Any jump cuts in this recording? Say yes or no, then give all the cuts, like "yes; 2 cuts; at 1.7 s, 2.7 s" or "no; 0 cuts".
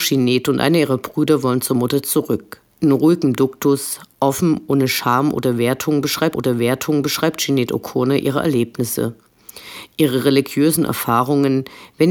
yes; 2 cuts; at 2.7 s, 6.3 s